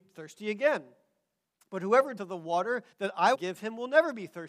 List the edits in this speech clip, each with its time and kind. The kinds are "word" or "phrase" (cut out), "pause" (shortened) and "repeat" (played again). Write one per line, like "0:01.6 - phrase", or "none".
0:02.2 - word
0:02.9 - pause
0:03.3 - word